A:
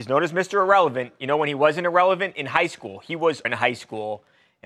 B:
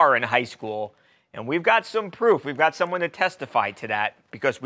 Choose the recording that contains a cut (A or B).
A